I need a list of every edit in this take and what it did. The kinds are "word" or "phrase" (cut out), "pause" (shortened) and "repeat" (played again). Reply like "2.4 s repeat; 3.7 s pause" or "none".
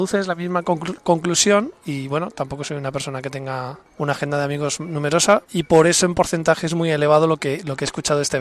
3.9 s pause; 5.4 s pause